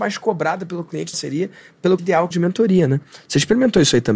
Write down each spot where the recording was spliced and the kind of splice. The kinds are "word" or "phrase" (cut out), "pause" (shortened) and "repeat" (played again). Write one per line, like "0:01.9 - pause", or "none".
0:01.1 - phrase
0:02.0 - word
0:02.3 - phrase